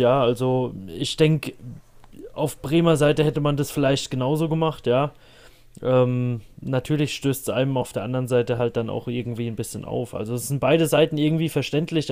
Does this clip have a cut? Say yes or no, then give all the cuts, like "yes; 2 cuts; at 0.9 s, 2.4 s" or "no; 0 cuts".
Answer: no; 0 cuts